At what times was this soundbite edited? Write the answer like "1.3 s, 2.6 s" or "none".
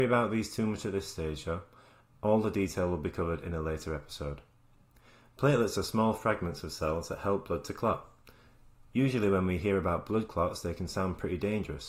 4.8 s